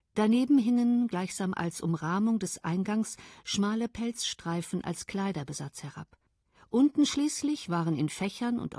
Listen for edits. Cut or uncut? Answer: cut